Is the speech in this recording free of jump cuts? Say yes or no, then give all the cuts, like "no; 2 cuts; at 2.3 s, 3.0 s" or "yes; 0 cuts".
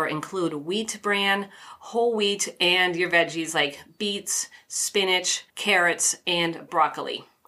no; 1 cut; at 5.5 s